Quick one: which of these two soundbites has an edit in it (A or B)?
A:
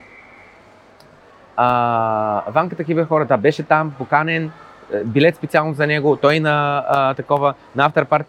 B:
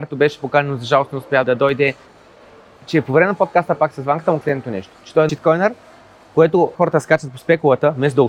B